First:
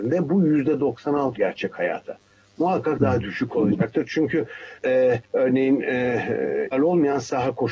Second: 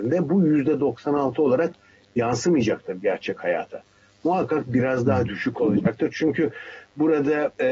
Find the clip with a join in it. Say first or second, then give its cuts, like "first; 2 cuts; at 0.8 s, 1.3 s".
first; 5 cuts; at 1.4 s, 3.0 s, 4.8 s, 5.2 s, 6.7 s